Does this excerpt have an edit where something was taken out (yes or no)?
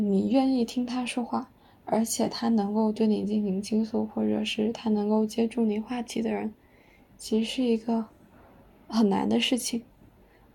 no